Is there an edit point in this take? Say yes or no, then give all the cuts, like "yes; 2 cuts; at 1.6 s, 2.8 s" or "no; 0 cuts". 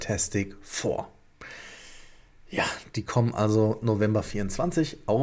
no; 0 cuts